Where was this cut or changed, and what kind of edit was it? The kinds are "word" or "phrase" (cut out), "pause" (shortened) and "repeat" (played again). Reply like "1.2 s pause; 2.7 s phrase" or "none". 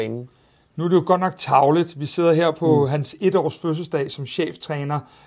none